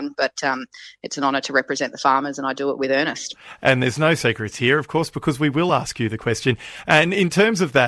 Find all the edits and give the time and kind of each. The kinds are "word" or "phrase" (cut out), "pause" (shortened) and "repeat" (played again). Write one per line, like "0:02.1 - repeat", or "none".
none